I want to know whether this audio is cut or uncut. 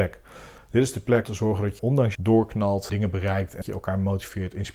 cut